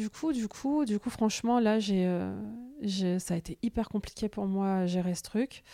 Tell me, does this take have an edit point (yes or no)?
no